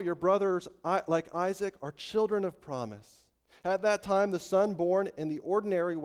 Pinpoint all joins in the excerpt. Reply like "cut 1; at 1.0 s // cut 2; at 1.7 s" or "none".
none